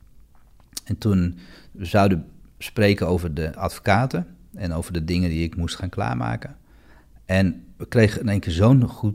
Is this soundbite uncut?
yes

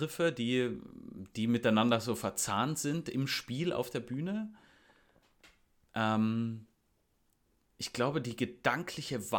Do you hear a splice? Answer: no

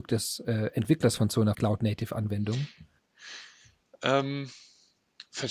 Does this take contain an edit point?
yes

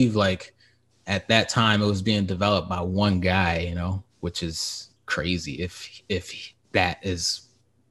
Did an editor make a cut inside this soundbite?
yes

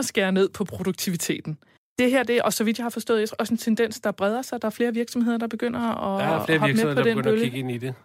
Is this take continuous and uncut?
no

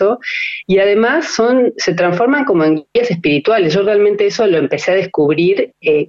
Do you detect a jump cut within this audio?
no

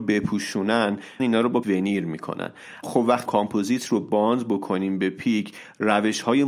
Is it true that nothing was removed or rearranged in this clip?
no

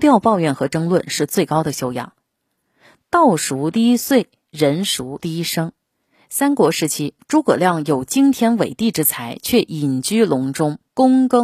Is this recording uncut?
yes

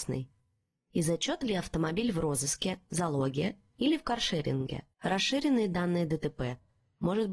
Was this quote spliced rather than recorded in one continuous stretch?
yes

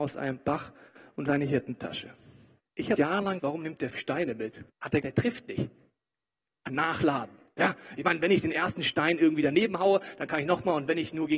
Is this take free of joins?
no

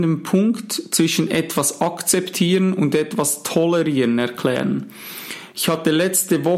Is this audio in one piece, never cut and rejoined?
yes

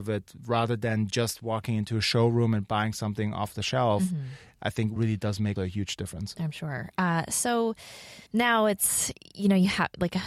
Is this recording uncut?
no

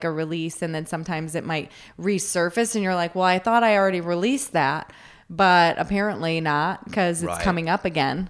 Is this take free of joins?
yes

